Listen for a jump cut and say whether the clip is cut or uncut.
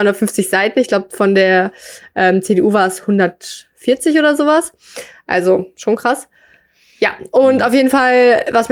uncut